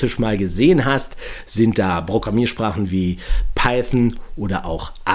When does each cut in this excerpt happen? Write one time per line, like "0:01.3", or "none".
none